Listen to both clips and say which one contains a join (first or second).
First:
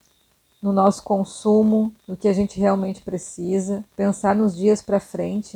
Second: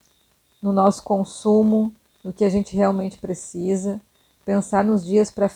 first